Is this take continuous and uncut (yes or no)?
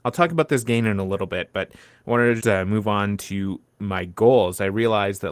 no